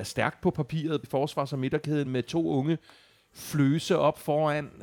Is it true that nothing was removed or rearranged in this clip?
no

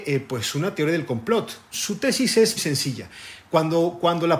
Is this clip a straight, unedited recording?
no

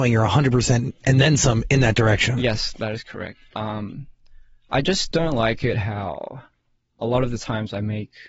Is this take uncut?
yes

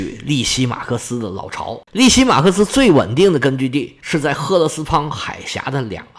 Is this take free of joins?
no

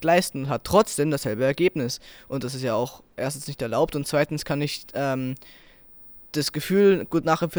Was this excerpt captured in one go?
yes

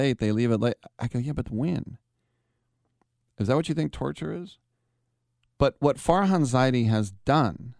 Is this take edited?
yes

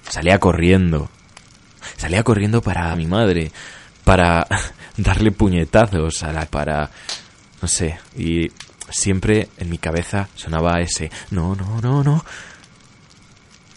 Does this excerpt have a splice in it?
yes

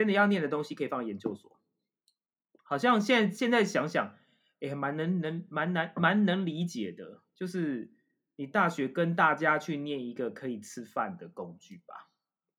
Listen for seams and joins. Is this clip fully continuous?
yes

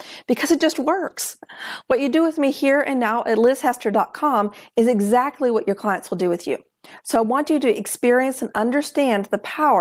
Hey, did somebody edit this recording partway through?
no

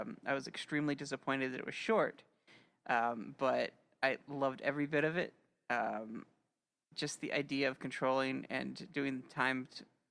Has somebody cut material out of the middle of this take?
no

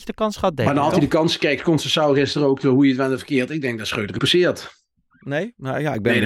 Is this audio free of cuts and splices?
no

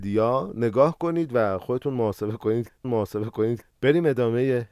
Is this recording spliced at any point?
yes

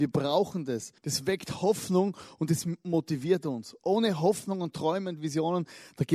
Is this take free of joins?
no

